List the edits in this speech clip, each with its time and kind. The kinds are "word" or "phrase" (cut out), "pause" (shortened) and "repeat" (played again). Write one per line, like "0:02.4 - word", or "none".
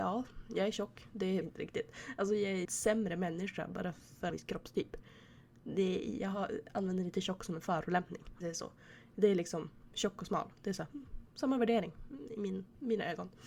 0:01.4 - phrase
0:02.6 - word
0:04.3 - phrase
0:08.4 - word